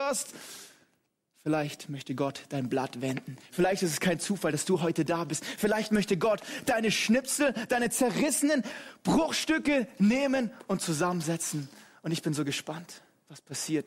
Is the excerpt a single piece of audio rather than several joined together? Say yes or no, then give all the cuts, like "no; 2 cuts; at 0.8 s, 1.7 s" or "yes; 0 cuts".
yes; 0 cuts